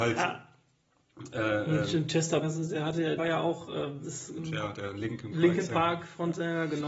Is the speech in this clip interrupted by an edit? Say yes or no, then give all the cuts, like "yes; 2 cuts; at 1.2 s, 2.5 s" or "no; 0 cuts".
yes; 4 cuts; at 2.4 s, 3.2 s, 4.0 s, 4.4 s